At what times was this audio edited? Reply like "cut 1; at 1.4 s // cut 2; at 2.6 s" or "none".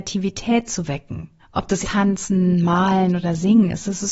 cut 1; at 1.4 s // cut 2; at 1.8 s

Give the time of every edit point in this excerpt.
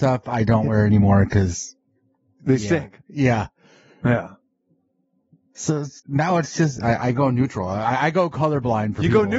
cut 1; at 1.8 s // cut 2; at 6.0 s

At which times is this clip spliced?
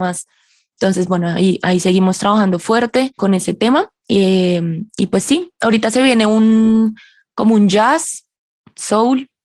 none

